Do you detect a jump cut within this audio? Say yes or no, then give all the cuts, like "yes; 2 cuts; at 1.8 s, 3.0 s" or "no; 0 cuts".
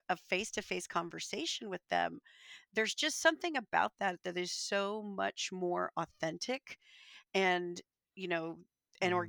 no; 0 cuts